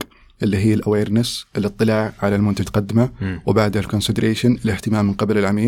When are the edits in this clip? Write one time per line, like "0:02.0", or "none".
0:02.6